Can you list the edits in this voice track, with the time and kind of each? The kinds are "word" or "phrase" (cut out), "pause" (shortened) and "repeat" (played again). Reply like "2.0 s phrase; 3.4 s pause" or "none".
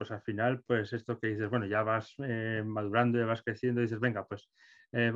none